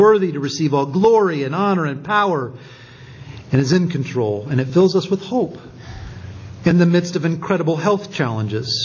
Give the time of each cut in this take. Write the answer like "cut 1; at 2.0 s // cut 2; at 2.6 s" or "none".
none